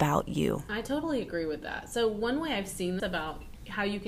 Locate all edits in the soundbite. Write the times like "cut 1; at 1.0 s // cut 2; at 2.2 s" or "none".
cut 1; at 3.0 s